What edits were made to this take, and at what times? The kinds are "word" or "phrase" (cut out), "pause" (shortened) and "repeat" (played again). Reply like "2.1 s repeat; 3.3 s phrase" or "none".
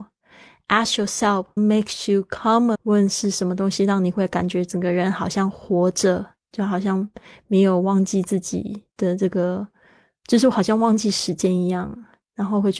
1.6 s word; 2.7 s word; 8.9 s pause